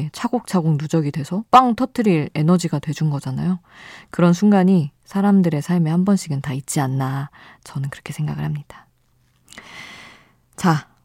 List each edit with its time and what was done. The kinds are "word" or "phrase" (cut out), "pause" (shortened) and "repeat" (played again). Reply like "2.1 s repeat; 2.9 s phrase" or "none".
1.5 s pause